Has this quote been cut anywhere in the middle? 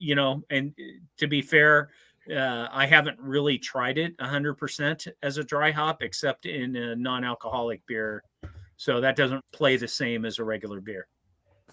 yes; 1 cut; at 9.4 s

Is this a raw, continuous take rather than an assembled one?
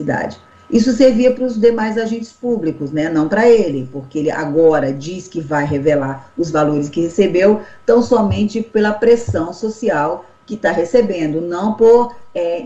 yes; 0 cuts

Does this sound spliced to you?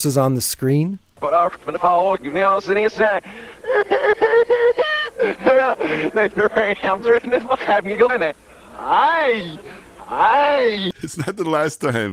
yes; 3 cuts; at 6.3 s, 8.1 s, 8.5 s

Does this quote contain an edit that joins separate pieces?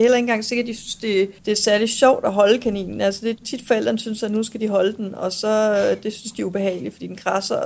yes; 1 cut; at 1.4 s

